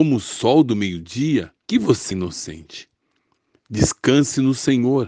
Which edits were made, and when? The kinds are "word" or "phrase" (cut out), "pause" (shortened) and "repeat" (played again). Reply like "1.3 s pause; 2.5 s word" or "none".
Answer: 1.6 s pause; 2.1 s word